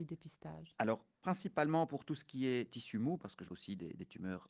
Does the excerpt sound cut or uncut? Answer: cut